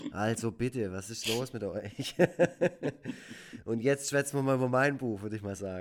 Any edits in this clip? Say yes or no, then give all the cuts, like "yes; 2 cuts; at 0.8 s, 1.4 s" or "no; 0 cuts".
no; 0 cuts